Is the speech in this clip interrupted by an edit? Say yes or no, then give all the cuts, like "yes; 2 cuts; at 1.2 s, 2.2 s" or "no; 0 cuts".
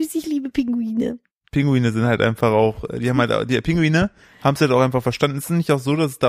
no; 0 cuts